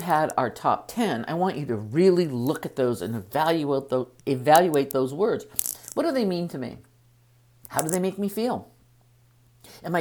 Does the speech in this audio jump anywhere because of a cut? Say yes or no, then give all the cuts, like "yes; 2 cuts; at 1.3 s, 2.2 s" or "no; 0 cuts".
no; 0 cuts